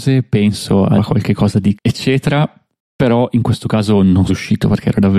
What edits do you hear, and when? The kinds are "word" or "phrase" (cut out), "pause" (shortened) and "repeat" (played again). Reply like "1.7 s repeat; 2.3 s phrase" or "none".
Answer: 1.0 s word; 1.7 s word; 4.3 s word